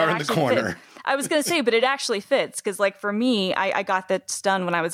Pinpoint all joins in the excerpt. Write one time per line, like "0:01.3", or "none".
none